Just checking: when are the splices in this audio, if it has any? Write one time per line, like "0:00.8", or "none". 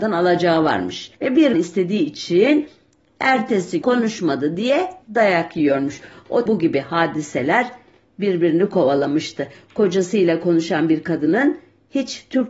0:01.1
0:01.5
0:03.8
0:05.0
0:06.5